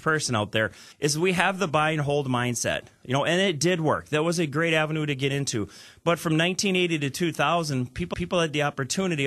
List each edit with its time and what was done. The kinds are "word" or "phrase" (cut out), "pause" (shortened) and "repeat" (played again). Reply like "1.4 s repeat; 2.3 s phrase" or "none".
0.9 s pause; 8.1 s repeat